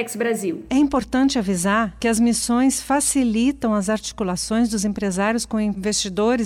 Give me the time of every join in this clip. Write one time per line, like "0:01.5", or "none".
none